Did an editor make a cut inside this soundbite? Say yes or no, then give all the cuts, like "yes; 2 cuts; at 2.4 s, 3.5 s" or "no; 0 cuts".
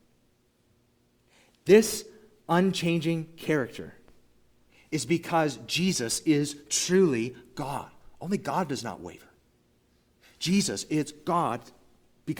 no; 0 cuts